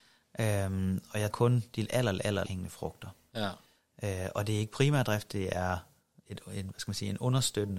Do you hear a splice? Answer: yes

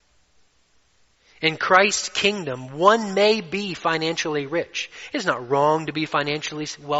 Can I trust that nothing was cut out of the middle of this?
yes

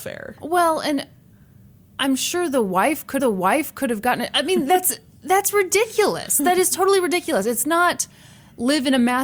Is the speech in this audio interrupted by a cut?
yes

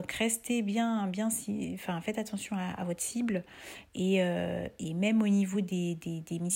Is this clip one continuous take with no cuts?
yes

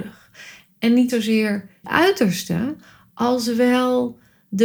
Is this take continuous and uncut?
no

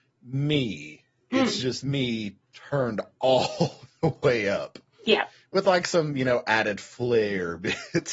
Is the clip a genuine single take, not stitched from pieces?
yes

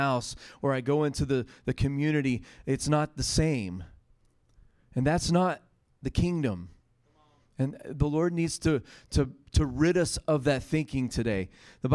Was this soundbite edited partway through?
no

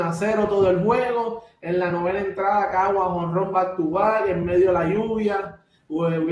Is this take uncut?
yes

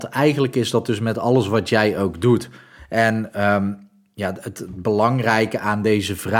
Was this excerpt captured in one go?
yes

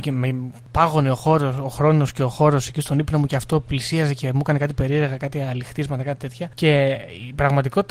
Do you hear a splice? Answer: no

